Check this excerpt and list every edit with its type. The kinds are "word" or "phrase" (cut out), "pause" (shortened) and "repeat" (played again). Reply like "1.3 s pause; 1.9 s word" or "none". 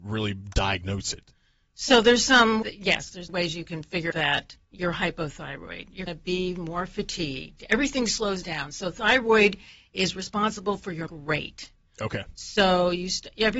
2.6 s word; 3.3 s word; 4.1 s word; 4.6 s pause; 6.1 s word; 11.1 s word